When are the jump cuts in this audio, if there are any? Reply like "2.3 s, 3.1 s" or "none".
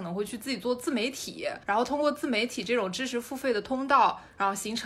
1.6 s